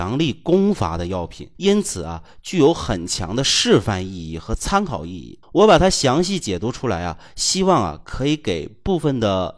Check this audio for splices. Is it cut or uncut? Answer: cut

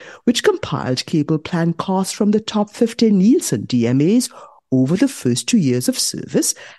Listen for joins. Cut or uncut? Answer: uncut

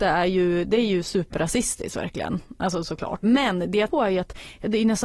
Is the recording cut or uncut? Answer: cut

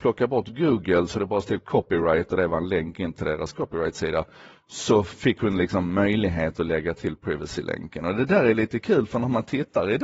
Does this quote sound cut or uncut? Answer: uncut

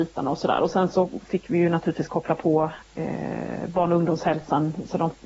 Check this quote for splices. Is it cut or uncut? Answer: cut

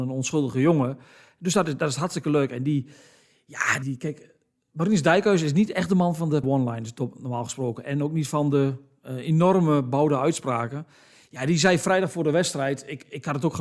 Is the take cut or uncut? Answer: cut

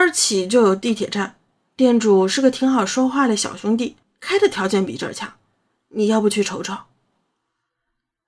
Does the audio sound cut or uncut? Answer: cut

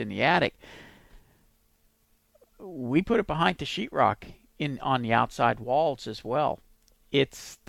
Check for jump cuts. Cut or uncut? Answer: uncut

